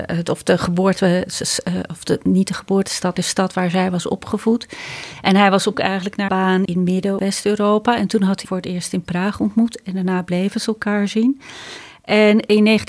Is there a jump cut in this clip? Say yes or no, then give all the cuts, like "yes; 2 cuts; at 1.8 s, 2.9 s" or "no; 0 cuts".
yes; 6 cuts; at 3.2 s, 5.7 s, 6.3 s, 6.7 s, 7.2 s, 8.4 s